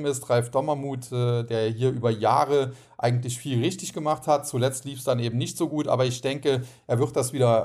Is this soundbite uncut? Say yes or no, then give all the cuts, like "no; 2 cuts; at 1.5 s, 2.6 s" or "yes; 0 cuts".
yes; 0 cuts